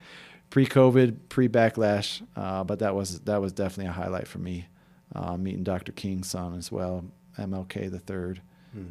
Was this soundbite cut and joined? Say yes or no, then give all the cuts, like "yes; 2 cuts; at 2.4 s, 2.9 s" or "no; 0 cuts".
no; 0 cuts